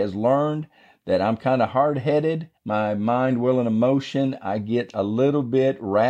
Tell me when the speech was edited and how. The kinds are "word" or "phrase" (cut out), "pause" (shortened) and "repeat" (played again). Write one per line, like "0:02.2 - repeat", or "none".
0:02.6 - pause